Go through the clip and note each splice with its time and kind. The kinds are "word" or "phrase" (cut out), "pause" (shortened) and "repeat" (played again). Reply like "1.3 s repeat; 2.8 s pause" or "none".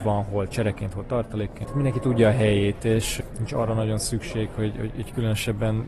none